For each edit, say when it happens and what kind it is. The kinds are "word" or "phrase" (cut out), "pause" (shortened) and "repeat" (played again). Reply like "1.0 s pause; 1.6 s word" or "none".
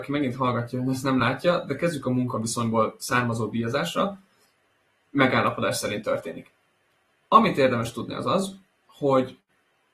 none